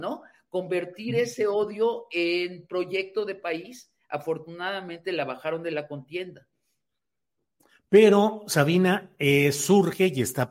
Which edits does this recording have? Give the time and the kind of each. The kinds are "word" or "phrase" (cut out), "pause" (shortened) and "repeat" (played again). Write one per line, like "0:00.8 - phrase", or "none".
none